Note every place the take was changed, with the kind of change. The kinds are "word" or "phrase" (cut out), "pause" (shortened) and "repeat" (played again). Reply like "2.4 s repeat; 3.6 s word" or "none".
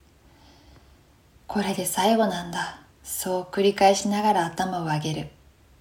2.9 s pause